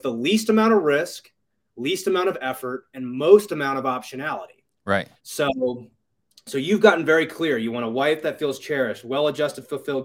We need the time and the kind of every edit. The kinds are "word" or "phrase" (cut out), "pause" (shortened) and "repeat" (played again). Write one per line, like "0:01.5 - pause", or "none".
0:05.2 - pause